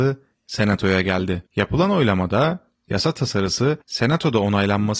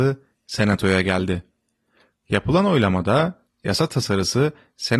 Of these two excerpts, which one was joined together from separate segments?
first; 2 cuts; at 1.5 s, 3.8 s

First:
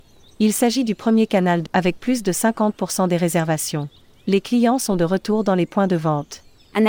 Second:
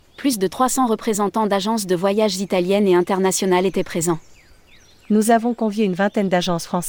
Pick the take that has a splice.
first; 1 cut; at 1.7 s

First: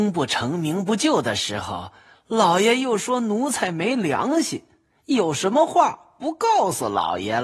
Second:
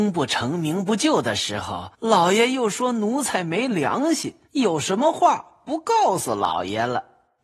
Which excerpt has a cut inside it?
second; 2 cuts; at 1.9 s, 4.5 s

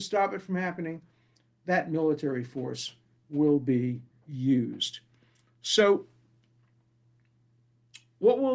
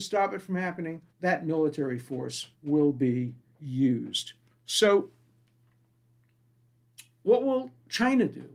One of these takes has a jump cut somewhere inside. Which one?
second; 3 cuts; at 1.1 s, 2.5 s, 4.5 s

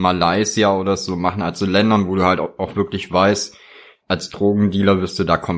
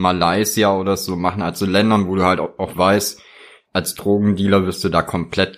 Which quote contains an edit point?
second; 1 cut; at 2.7 s

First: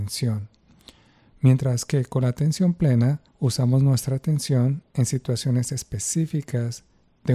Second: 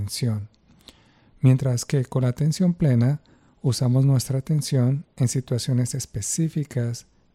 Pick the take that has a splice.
first; 1 cut; at 3.3 s

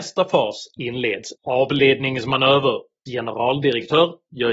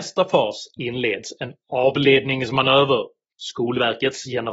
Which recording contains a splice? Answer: first; 2 cuts; at 1.3 s, 3.1 s

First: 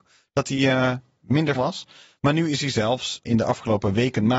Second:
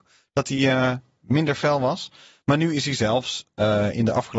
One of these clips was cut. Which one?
first; 2 cuts; at 1.5 s, 3.2 s

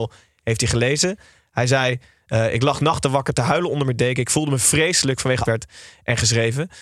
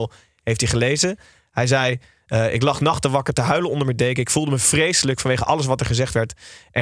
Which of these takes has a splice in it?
first; 1 cut; at 5.4 s

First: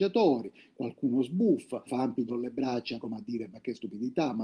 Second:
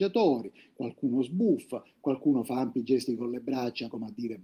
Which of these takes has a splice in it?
first; 2 cuts; at 1.9 s, 2.3 s

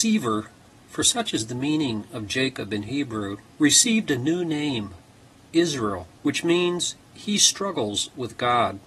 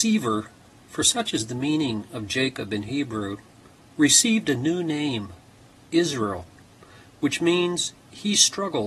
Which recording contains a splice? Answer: first; 2 cuts; at 3.5 s, 6.2 s

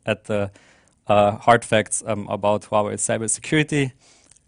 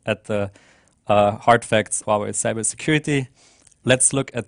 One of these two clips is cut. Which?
second; 1 cut; at 2.0 s

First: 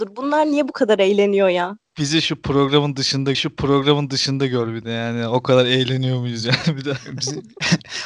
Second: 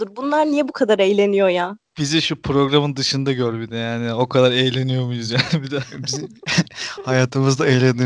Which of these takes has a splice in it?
first; 1 cut; at 3.3 s

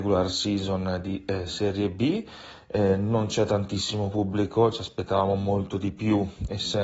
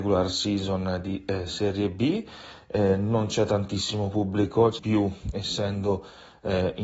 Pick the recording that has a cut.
second; 1 cut; at 4.8 s

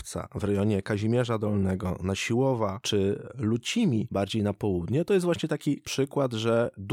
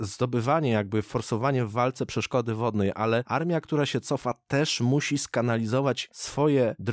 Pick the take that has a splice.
first; 1 cut; at 5.8 s

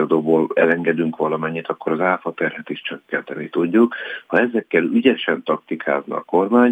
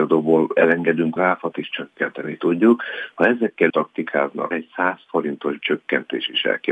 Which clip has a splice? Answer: second; 5 cuts; at 1.2 s, 1.5 s, 3.7 s, 4.5 s, 5.6 s

